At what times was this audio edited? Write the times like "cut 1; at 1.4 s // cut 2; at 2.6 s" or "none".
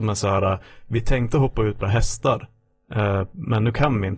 cut 1; at 1.8 s